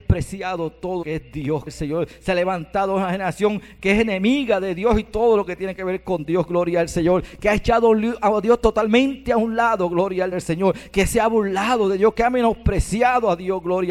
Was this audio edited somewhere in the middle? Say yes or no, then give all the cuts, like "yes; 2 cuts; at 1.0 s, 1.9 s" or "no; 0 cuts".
yes; 3 cuts; at 1.0 s, 1.7 s, 10.3 s